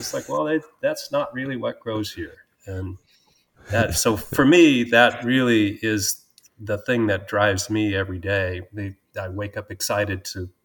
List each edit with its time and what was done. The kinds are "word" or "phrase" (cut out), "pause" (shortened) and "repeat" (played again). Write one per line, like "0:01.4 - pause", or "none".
none